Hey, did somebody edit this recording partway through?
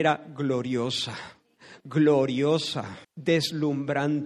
yes; 1 cut; at 3.0 s

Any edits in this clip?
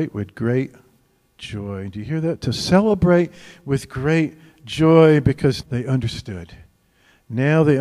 yes; 1 cut; at 5.6 s

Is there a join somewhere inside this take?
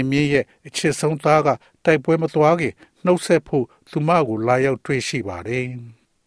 no; 0 cuts

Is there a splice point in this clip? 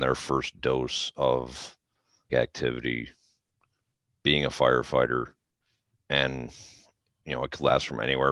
yes; 1 cut; at 2.3 s

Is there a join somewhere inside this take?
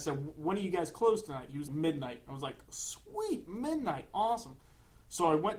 yes; 1 cut; at 1.7 s

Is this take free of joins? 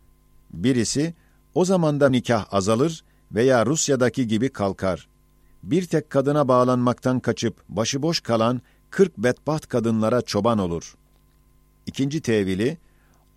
no; 2 cuts; at 2.1 s, 7.6 s

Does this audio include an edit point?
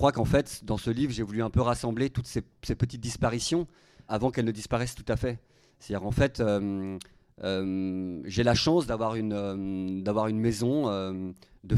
yes; 1 cut; at 4.1 s

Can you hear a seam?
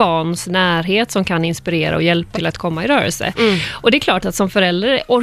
yes; 1 cut; at 2.3 s

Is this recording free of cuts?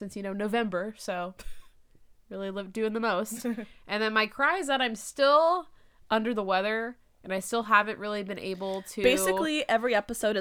yes; 0 cuts

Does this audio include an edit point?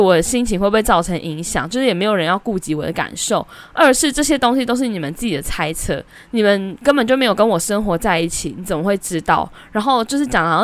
yes; 1 cut; at 6.1 s

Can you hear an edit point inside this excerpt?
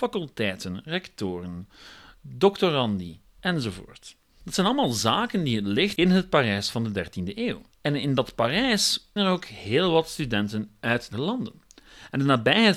yes; 4 cuts; at 6.0 s, 7.7 s, 9.2 s, 11.1 s

